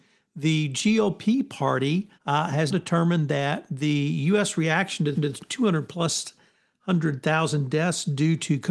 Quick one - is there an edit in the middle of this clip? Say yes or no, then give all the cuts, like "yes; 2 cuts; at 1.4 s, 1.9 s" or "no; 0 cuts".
yes; 3 cuts; at 2.1 s, 2.7 s, 5.1 s